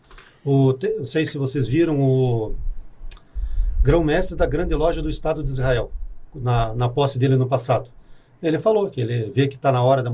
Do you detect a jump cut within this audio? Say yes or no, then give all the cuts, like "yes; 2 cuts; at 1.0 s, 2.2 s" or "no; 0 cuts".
no; 0 cuts